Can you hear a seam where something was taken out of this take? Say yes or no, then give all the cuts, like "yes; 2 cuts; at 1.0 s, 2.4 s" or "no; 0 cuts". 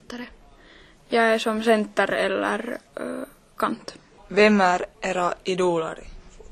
yes; 3 cuts; at 2.9 s, 4.2 s, 4.9 s